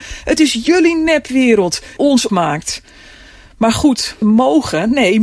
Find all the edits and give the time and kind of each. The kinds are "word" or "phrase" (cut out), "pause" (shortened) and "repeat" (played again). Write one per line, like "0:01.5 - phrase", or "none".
0:02.0 - word
0:02.3 - word
0:04.2 - word